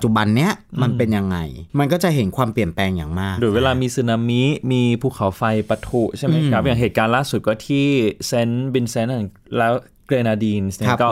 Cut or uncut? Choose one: cut